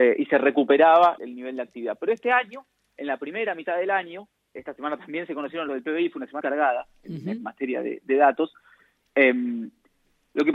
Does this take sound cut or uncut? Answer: cut